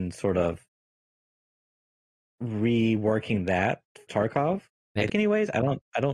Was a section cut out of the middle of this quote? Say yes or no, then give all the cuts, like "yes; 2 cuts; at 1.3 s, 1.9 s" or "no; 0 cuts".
yes; 3 cuts; at 4.1 s, 4.7 s, 5.1 s